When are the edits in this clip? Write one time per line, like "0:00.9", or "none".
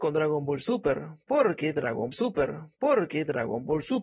0:02.1